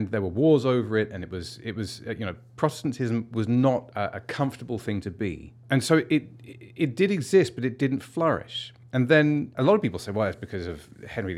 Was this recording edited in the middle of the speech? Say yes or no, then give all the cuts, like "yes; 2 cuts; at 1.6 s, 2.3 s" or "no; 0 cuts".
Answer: no; 0 cuts